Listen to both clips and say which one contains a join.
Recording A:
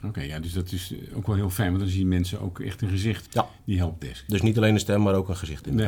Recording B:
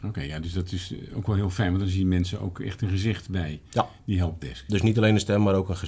A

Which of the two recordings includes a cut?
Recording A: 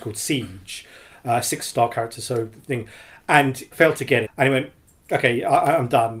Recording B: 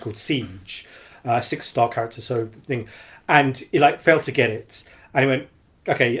A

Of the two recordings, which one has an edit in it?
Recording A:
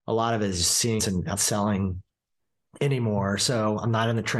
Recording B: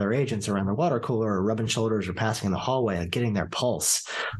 A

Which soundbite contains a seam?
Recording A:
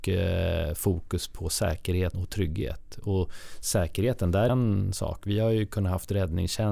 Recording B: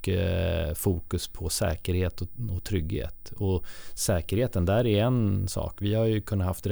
A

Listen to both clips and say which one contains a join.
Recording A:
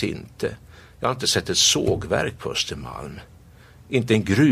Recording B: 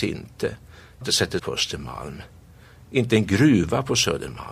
B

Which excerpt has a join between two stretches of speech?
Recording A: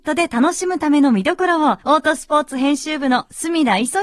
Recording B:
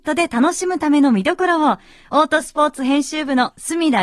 A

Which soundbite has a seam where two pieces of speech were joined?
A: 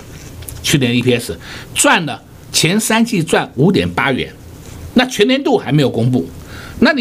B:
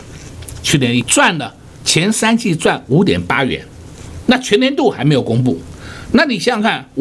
B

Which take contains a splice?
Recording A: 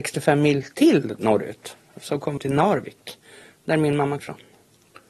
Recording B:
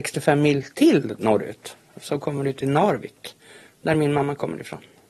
A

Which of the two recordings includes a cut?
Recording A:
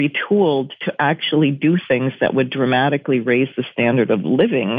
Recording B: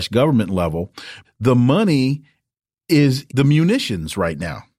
B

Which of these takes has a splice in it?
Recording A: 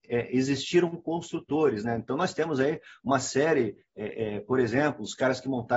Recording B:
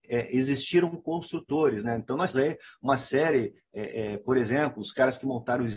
B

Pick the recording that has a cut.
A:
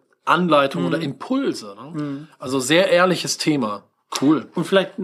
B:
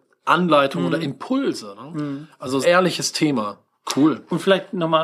B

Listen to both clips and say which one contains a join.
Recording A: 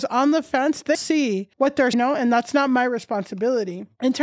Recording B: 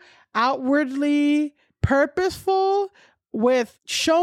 A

